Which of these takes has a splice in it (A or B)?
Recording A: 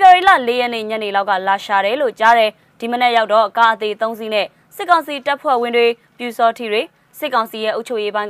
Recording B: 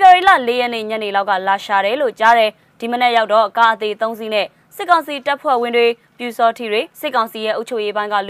B